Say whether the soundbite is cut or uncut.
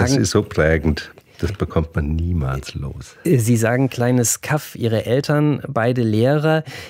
uncut